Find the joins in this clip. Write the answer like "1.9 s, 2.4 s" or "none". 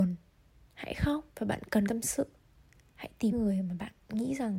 1.3 s, 1.9 s, 2.7 s, 3.3 s